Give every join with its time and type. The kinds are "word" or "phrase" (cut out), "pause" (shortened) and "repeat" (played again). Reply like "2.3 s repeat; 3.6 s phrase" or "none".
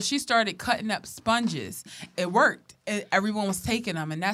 2.1 s word